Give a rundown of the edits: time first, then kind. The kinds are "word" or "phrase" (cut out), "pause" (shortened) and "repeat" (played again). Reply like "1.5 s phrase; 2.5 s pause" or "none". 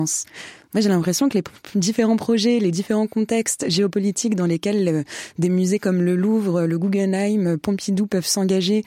none